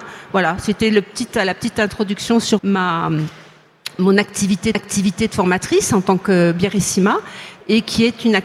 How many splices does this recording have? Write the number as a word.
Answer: two